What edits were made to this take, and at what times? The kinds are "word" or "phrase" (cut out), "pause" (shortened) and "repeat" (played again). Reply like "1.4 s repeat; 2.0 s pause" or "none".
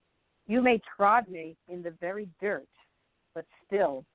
none